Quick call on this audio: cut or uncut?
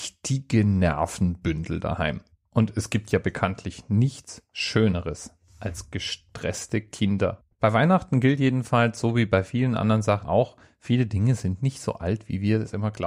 cut